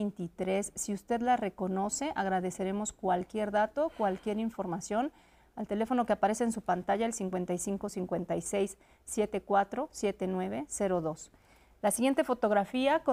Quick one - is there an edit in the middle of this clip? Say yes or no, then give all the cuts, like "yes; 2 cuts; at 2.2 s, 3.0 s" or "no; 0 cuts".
no; 0 cuts